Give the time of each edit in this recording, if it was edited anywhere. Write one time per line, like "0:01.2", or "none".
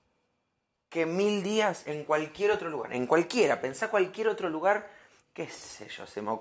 none